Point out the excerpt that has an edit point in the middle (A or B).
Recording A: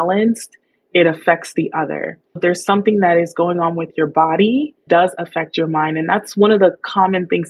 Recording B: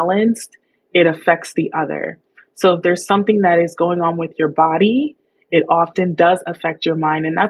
A